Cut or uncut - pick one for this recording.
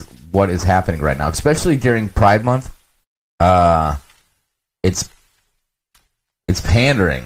cut